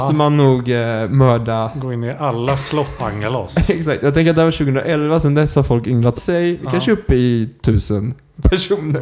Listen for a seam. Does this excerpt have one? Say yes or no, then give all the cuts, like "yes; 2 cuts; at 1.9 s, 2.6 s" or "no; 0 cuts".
yes; 2 cuts; at 3.0 s, 6.1 s